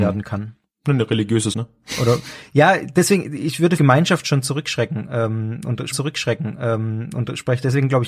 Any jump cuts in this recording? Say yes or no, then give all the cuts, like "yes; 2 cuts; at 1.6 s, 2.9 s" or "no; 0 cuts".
yes; 3 cuts; at 1.5 s, 3.8 s, 5.9 s